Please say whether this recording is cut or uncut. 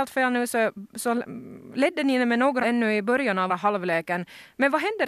cut